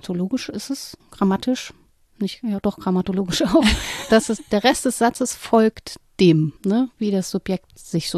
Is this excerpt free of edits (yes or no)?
no